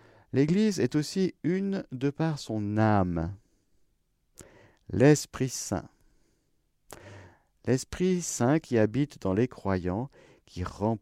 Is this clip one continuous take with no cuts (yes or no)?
yes